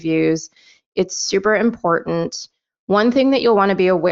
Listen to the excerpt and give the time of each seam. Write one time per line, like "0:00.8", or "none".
none

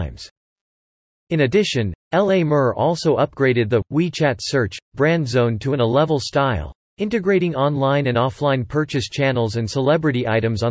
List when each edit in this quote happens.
none

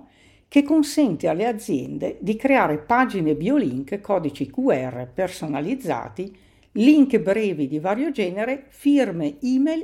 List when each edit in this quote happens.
none

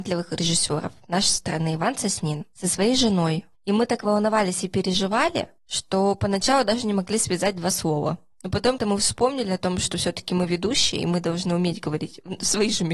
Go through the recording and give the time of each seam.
0:03.5
0:05.6
0:08.8

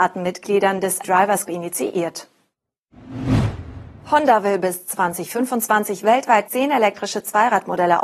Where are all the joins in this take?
0:01.0
0:01.5
0:06.5

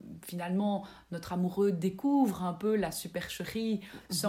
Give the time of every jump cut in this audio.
none

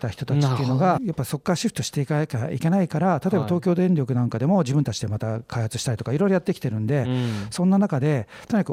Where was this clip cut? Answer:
0:01.0

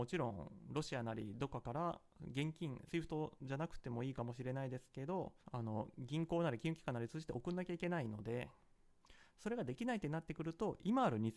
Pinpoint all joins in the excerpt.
0:02.9
0:05.4

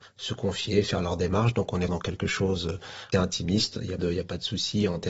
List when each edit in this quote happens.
0:01.9
0:03.1
0:04.0

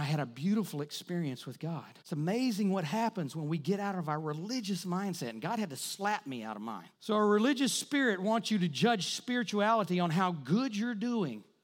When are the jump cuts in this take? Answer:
0:02.0
0:06.9

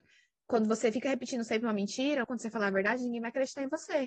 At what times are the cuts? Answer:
0:02.2

